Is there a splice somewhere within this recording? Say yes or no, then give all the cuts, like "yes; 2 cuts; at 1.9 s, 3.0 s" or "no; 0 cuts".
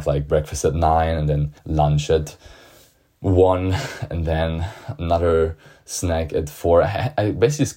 yes; 1 cut; at 1.6 s